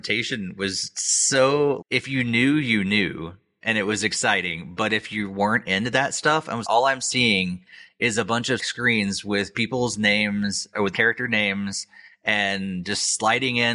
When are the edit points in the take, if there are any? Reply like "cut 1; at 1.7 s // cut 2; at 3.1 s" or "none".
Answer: cut 1; at 1.8 s // cut 2; at 6.6 s // cut 3; at 8.6 s // cut 4; at 10.9 s